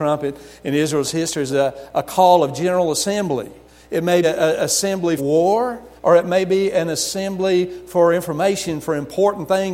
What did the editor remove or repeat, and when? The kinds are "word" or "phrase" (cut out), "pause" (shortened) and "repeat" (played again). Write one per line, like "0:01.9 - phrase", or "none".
0:01.5 - word
0:03.7 - pause
0:04.2 - word
0:05.2 - word
0:06.0 - pause